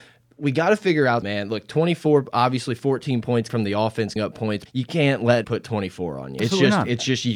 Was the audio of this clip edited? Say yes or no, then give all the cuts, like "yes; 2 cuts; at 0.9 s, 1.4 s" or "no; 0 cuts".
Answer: yes; 6 cuts; at 1.2 s, 3.5 s, 4.2 s, 4.7 s, 5.4 s, 6.4 s